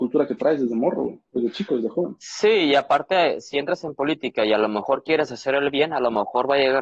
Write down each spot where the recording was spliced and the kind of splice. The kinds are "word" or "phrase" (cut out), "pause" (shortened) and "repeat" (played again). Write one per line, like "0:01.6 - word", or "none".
0:01.3 - pause